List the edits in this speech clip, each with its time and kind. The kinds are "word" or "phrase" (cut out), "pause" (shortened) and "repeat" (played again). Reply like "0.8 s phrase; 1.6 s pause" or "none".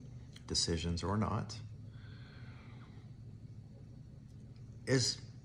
none